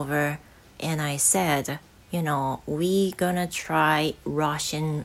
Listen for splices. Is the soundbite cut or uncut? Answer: uncut